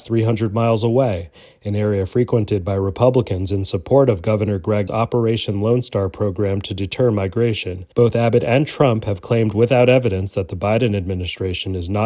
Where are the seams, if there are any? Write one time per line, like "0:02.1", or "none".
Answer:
0:04.9
0:07.9